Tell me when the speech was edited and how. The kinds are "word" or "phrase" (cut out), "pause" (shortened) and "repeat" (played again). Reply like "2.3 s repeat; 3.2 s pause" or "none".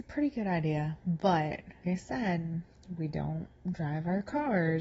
1.8 s phrase